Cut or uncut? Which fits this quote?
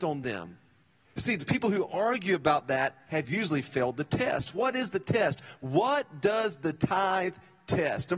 cut